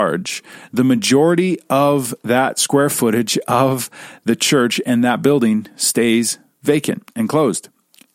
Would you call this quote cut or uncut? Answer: uncut